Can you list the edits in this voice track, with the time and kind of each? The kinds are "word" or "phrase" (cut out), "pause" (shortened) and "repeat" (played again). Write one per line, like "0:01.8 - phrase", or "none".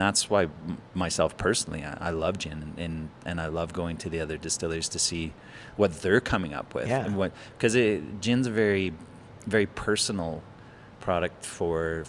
none